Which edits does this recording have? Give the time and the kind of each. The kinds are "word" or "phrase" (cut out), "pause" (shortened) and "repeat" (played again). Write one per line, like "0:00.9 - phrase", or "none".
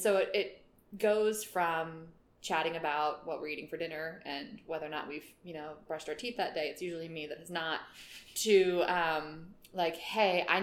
none